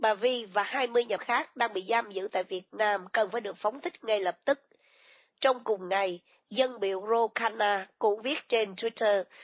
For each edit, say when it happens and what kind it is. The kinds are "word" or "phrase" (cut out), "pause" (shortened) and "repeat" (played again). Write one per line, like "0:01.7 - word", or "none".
0:01.2 - word